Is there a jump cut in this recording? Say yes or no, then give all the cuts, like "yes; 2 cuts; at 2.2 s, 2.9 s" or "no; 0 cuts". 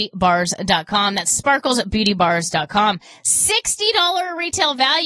no; 0 cuts